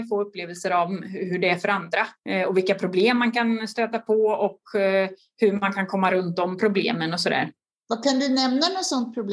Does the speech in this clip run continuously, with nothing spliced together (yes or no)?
no